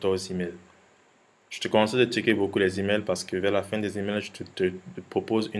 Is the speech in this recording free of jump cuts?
yes; 0 cuts

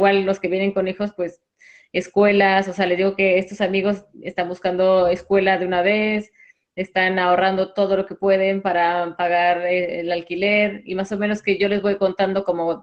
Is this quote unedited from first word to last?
yes; 0 cuts

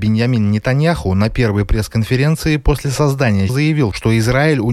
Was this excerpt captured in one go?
no; 1 cut; at 3.5 s

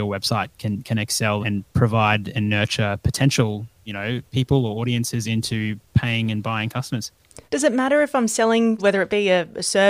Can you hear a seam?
yes; 5 cuts; at 1.4 s, 4.3 s, 5.9 s, 7.4 s, 8.8 s

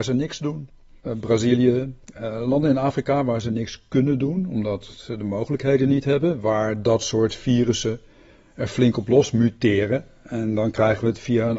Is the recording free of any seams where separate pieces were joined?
yes; 0 cuts

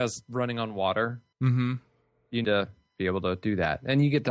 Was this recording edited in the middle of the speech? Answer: yes; 2 cuts; at 1.3 s, 2.4 s

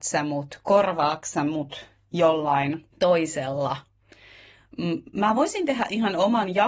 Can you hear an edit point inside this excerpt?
yes; 1 cut; at 2.9 s

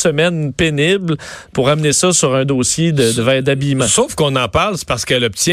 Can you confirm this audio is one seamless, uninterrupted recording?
yes; 0 cuts

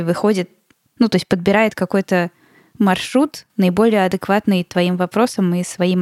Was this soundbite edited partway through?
no; 0 cuts

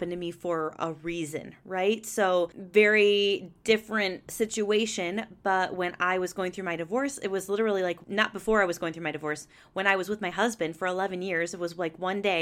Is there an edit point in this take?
no; 0 cuts

